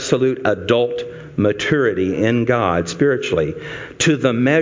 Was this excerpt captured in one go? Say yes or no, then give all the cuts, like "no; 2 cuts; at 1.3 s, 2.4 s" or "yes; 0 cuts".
yes; 0 cuts